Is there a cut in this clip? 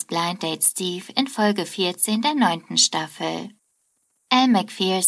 no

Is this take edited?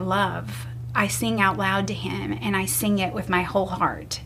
no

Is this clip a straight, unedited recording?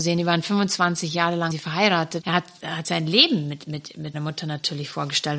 no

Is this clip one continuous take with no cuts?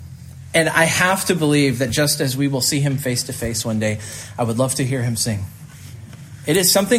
yes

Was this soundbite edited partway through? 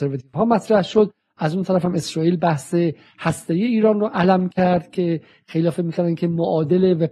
no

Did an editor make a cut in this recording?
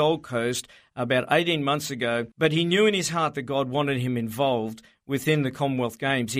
yes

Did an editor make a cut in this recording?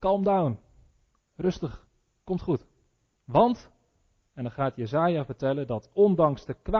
no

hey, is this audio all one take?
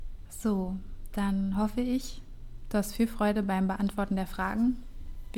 yes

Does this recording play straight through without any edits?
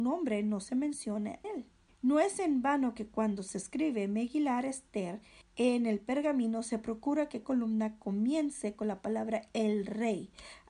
no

